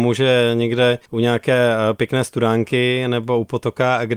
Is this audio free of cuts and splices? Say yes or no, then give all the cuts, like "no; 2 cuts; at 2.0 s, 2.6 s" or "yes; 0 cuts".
no; 1 cut; at 1.1 s